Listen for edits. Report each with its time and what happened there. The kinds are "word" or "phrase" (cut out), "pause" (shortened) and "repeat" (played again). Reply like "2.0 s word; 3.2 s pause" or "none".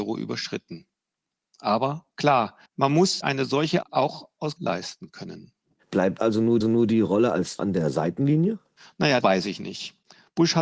2.7 s pause; 3.2 s word; 3.8 s word; 4.6 s word; 6.2 s word; 6.6 s repeat; 7.6 s word; 9.2 s word